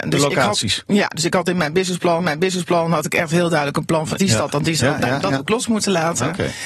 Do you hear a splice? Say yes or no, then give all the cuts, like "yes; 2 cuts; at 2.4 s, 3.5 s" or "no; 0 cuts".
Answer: yes; 2 cuts; at 2.2 s, 4.2 s